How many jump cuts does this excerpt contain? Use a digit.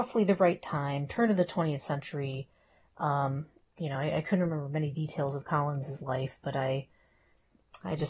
0